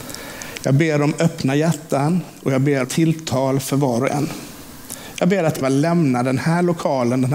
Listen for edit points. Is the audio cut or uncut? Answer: cut